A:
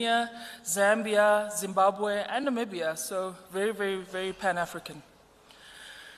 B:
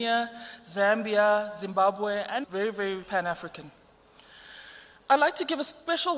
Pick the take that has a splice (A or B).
B